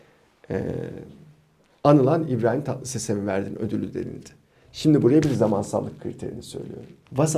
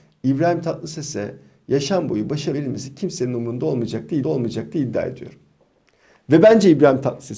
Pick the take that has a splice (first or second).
second